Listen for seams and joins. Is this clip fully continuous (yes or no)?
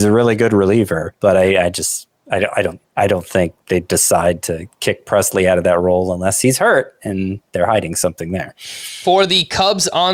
no